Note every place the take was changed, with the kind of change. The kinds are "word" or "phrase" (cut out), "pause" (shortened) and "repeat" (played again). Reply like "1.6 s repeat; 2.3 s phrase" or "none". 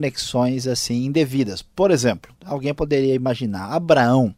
none